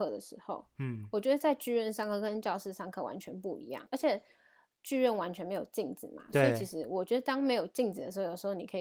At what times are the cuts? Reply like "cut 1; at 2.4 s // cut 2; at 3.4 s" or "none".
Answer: none